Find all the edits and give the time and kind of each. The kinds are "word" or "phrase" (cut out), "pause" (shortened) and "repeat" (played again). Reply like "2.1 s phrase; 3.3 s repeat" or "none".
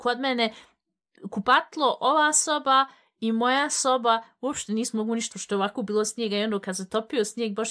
5.3 s word